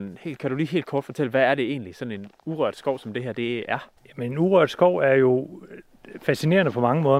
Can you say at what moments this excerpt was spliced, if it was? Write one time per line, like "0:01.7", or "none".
0:04.0